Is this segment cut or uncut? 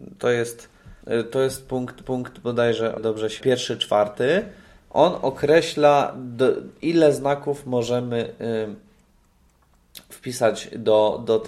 cut